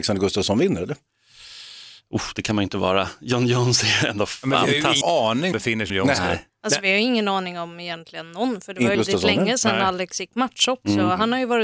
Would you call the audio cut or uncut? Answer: cut